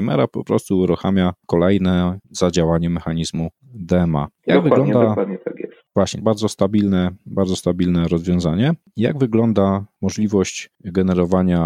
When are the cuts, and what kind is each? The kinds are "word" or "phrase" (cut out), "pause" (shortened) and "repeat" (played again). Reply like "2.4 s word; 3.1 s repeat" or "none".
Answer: 6.2 s phrase